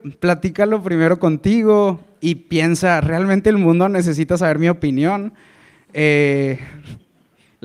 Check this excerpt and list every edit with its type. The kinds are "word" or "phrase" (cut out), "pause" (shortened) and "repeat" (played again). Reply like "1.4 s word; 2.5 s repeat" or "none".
none

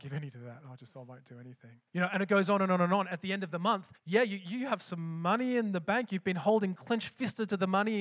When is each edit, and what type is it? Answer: 1.9 s pause; 4.0 s pause

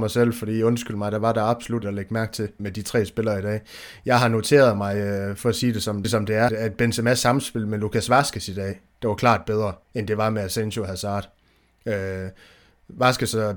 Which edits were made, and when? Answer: 1.8 s word; 2.6 s word; 5.4 s word; 6.0 s phrase; 6.5 s word; 9.8 s pause

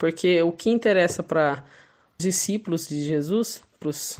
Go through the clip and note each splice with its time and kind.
2.2 s word

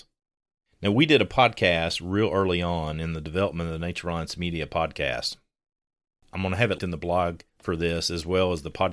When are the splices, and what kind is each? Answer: 6.8 s word; 7.5 s pause

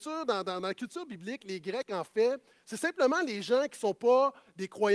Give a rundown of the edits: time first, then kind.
none

